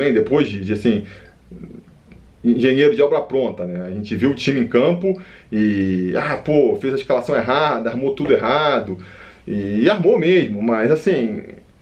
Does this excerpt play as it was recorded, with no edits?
yes; 0 cuts

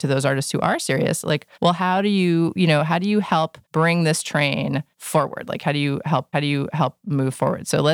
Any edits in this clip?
yes; 4 cuts; at 1.5 s, 3.6 s, 4.9 s, 6.3 s

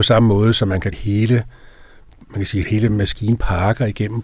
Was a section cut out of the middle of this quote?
yes; 2 cuts; at 0.9 s, 2.6 s

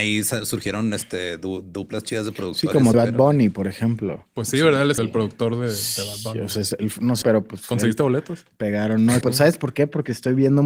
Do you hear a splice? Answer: yes; 4 cuts; at 2.9 s, 5.0 s, 7.2 s, 9.2 s

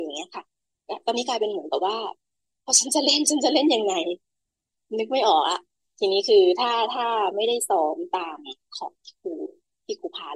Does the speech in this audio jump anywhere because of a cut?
no; 0 cuts

